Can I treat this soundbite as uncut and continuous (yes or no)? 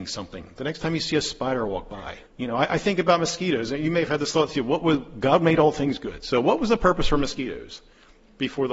no